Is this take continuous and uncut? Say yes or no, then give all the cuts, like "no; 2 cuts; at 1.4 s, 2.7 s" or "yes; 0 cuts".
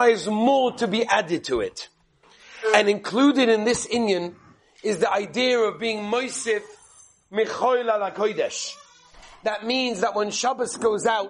yes; 0 cuts